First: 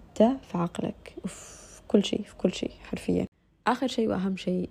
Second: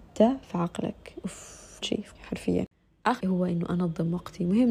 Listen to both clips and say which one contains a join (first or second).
second